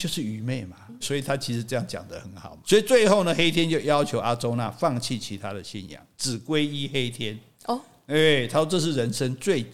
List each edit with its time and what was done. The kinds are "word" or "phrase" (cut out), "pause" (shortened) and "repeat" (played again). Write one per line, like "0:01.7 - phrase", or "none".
0:01.0 - word
0:02.6 - word

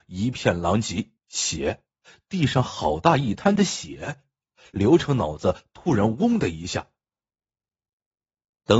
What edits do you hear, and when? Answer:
0:01.2 - pause

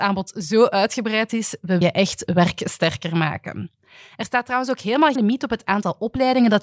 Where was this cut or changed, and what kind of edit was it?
0:01.8 - word
0:05.2 - word

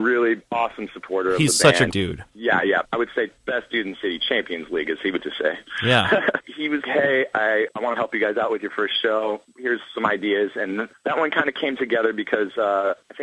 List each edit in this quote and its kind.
0:01.9 - word
0:02.8 - word
0:05.2 - word
0:06.8 - word
0:07.7 - phrase

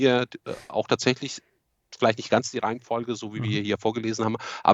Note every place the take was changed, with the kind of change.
none

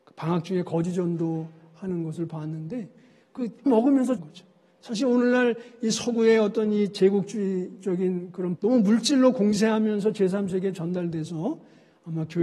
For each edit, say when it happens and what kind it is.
0:03.7 - word
0:04.2 - word
0:08.6 - word

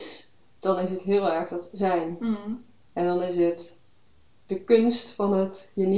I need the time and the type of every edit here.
none

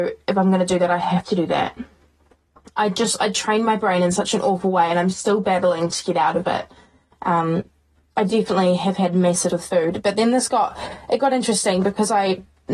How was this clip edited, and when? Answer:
0:09.5 - word

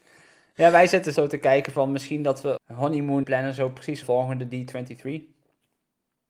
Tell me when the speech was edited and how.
0:01.2 - word
0:02.6 - word
0:03.2 - phrase
0:04.0 - phrase

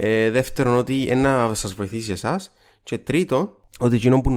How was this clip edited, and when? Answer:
none

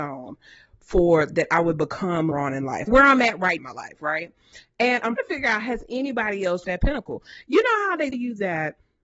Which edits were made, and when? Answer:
0:01.3 - word
0:02.3 - word
0:02.9 - word
0:03.6 - word
0:05.2 - word
0:06.6 - word
0:08.1 - word

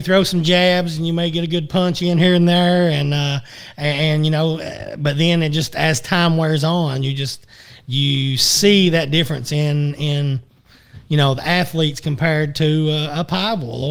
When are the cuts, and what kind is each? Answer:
none

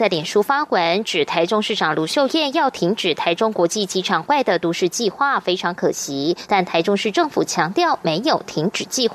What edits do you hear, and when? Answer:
none

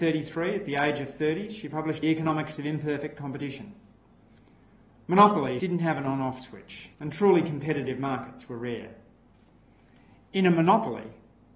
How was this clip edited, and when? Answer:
0:02.0 - phrase
0:05.6 - phrase
0:06.9 - pause

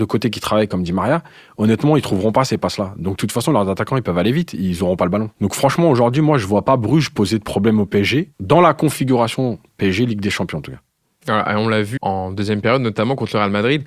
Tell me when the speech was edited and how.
0:12.0 - word

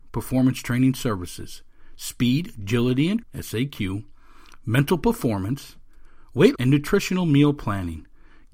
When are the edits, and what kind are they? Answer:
0:03.2 - word
0:06.6 - word

